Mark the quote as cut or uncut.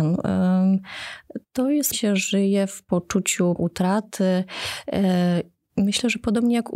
cut